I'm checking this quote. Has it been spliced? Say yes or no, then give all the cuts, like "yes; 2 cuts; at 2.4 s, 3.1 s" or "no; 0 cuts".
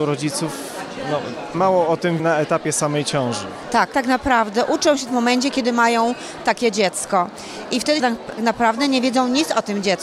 yes; 6 cuts; at 1.5 s, 2.2 s, 3.9 s, 5.1 s, 8.0 s, 8.4 s